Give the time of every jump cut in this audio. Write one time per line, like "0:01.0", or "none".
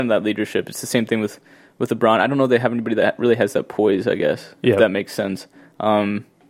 none